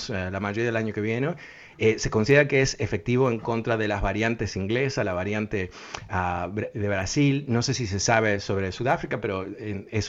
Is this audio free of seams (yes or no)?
yes